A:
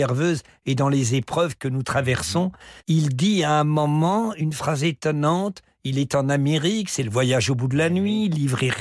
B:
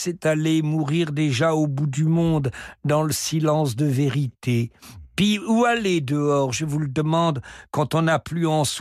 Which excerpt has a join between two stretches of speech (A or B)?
A